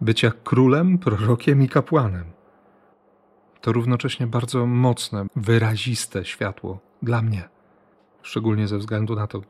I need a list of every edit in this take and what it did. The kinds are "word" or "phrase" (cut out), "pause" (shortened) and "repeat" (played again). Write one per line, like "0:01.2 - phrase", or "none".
0:05.3 - word